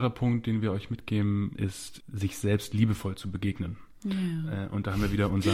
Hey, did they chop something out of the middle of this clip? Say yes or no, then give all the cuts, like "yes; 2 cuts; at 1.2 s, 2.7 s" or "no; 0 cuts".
yes; 2 cuts; at 1.6 s, 2.0 s